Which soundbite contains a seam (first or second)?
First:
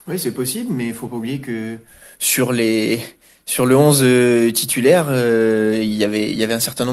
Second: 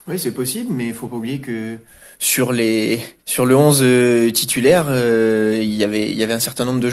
second